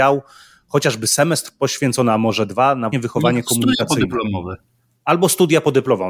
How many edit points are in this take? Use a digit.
1